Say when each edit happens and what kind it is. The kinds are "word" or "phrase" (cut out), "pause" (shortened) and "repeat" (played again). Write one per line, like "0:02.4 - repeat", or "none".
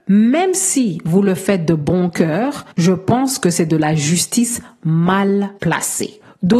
0:02.7 - pause
0:05.6 - pause